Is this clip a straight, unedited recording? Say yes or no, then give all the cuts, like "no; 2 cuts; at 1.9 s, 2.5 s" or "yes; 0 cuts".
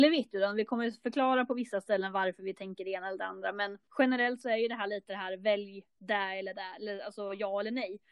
no; 1 cut; at 3.9 s